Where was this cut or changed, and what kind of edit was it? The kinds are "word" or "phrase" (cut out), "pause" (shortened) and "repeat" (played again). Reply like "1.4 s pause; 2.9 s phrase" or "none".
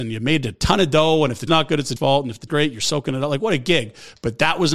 1.5 s word; 2.0 s word; 2.5 s word